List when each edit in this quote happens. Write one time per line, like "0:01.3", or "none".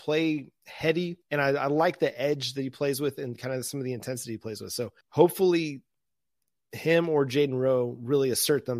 0:01.2
0:05.0